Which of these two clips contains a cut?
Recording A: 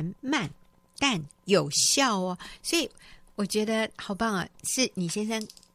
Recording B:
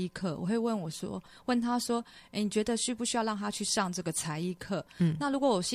A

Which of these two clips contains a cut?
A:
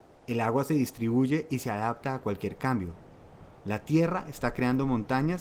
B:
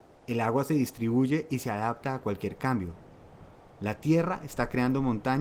A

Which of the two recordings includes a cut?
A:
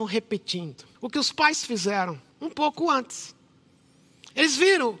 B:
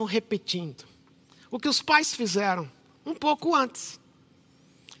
A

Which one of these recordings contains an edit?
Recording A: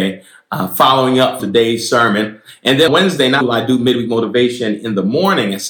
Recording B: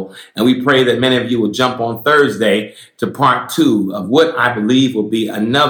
A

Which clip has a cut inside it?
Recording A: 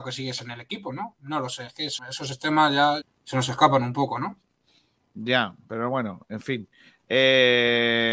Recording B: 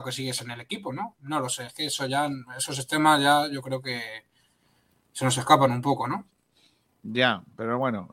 A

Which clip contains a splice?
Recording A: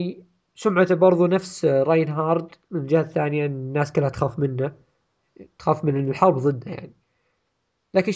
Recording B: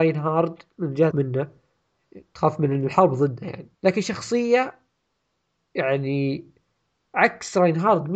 B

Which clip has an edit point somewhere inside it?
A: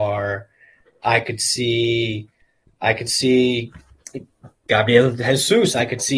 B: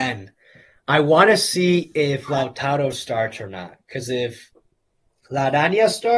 A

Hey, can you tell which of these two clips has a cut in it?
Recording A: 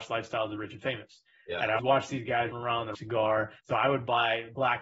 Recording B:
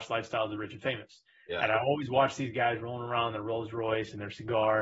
A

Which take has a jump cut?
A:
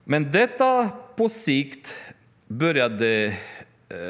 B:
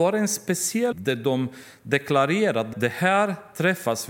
B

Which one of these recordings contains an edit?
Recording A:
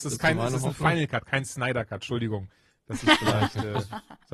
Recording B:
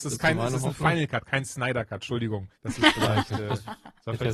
B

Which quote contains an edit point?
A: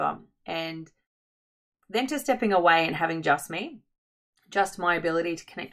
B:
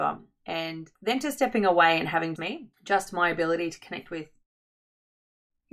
B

